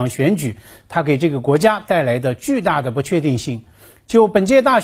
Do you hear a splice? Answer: no; 0 cuts

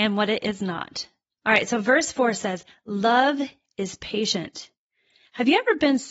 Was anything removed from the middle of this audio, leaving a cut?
no; 0 cuts

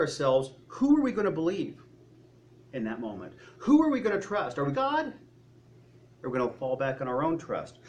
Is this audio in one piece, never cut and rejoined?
no; 1 cut; at 4.7 s

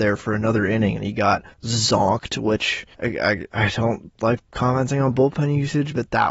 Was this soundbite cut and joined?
yes; 2 cuts; at 1.5 s, 2.9 s

